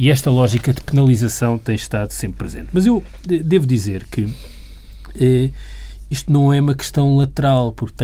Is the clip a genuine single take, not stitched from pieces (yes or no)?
yes